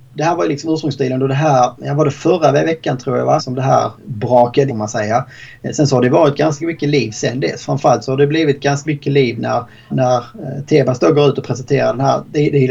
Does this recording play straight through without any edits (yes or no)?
no